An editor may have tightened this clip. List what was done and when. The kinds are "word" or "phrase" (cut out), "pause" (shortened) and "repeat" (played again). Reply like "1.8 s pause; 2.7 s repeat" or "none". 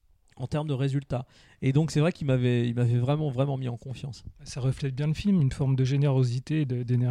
none